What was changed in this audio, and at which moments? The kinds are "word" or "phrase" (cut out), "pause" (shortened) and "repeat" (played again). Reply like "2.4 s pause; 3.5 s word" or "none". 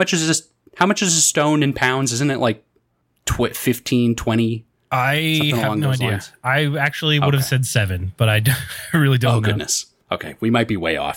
none